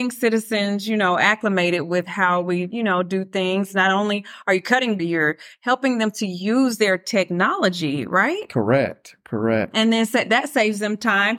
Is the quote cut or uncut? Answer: cut